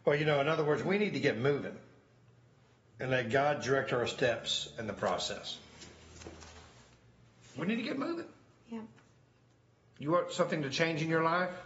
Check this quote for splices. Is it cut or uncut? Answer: uncut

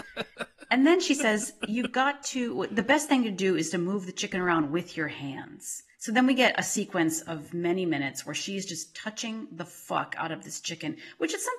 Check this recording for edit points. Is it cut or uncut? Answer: cut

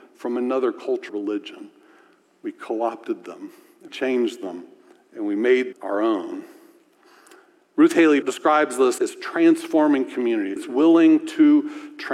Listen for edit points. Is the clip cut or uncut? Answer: cut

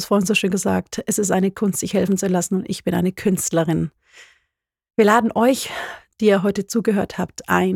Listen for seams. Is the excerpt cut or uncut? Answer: uncut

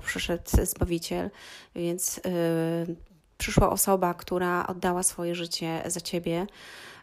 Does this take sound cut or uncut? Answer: uncut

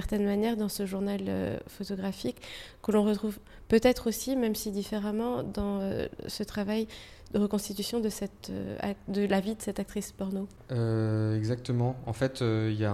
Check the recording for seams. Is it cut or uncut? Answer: uncut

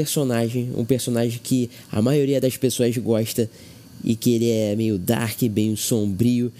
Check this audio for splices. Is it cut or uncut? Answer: uncut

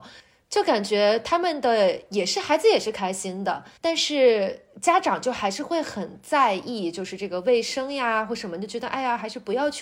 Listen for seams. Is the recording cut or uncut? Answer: cut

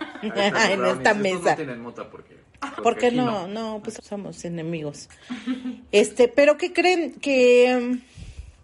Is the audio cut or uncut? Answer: cut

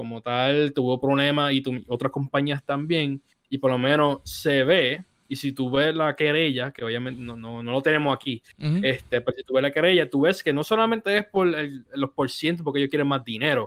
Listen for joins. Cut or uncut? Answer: uncut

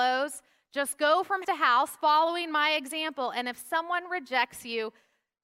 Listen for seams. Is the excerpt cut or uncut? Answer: cut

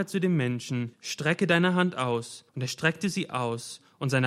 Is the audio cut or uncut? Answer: cut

